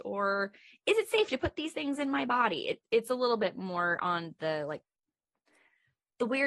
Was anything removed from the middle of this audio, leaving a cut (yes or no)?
no